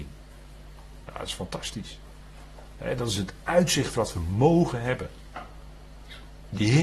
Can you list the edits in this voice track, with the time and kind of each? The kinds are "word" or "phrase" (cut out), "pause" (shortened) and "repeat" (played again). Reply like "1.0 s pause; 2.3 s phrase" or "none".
none